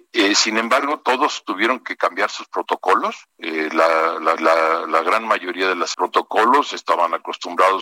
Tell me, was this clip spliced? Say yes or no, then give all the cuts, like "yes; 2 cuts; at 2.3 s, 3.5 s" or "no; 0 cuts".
yes; 3 cuts; at 3.3 s, 4.4 s, 5.9 s